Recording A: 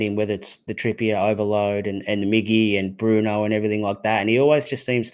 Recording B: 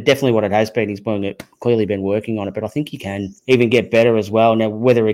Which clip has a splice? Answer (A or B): B